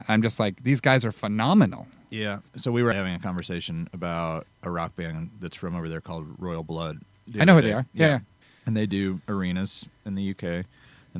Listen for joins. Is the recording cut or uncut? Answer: cut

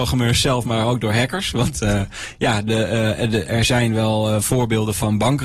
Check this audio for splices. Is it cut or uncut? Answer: uncut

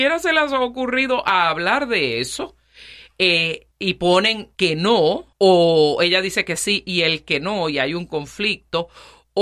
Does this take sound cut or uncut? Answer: cut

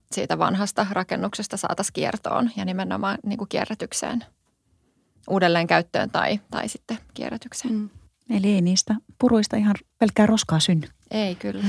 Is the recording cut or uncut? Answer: uncut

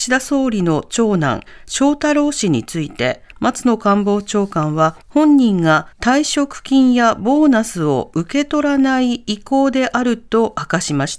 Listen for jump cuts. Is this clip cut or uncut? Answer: cut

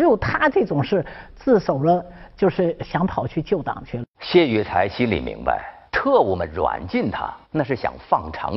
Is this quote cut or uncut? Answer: cut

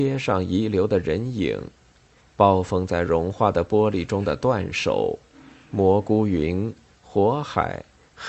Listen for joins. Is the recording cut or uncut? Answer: uncut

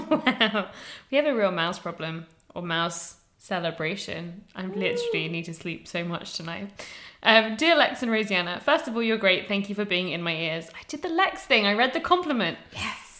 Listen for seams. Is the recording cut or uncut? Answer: uncut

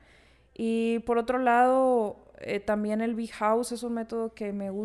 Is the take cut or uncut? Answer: uncut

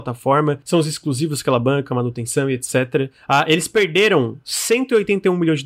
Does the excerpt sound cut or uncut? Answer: uncut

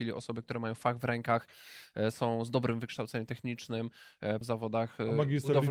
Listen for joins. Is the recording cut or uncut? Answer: cut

